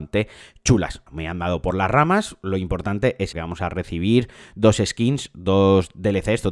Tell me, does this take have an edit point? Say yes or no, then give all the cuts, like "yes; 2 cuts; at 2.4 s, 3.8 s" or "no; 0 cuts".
yes; 2 cuts; at 1.1 s, 3.3 s